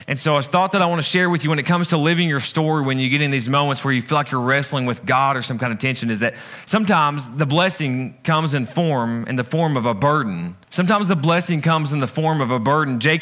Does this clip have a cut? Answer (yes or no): yes